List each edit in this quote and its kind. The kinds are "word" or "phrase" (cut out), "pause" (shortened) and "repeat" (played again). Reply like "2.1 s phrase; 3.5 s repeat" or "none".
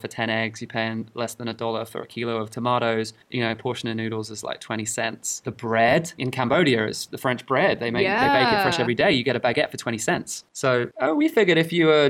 3.2 s pause